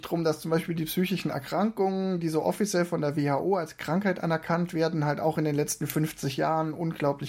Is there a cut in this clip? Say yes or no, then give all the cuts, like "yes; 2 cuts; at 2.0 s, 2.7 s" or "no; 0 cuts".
no; 0 cuts